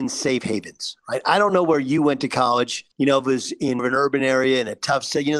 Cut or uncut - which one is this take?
cut